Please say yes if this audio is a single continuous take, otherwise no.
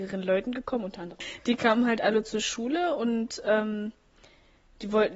yes